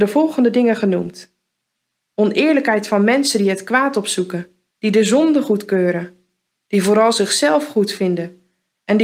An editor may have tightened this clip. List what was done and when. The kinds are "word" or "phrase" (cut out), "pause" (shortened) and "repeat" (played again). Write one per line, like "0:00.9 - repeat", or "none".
0:04.7 - pause